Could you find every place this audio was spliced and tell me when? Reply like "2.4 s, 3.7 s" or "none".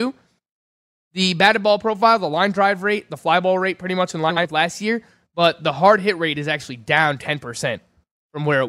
none